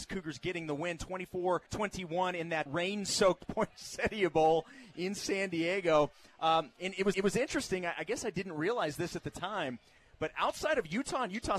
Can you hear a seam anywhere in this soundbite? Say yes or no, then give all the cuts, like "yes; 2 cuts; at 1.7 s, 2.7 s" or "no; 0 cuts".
yes; 3 cuts; at 1.7 s, 2.7 s, 7.1 s